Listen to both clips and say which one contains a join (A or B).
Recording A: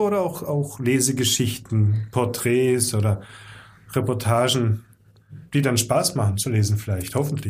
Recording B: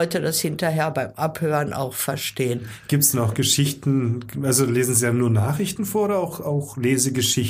A